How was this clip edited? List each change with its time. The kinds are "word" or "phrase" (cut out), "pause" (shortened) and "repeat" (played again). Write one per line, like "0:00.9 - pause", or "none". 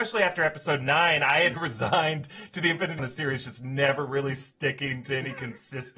0:01.5 - word
0:03.0 - phrase